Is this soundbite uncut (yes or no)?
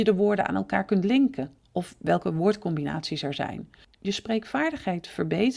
yes